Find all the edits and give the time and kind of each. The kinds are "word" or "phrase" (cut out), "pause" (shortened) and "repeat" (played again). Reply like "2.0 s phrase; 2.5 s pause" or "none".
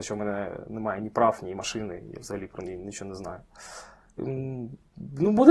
none